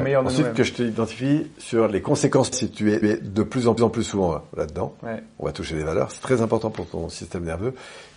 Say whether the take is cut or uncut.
cut